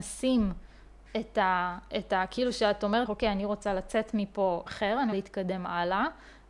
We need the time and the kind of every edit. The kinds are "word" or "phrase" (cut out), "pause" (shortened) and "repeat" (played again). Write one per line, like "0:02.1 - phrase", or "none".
0:03.1 - word
0:04.7 - word
0:05.1 - word